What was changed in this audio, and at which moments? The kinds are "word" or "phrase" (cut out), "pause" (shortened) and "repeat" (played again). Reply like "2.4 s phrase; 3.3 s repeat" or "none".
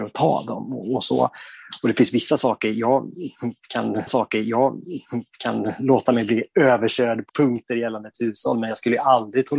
4.1 s repeat; 7.3 s word